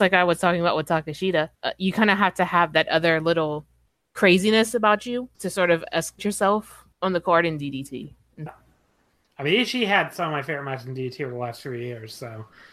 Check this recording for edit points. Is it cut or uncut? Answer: cut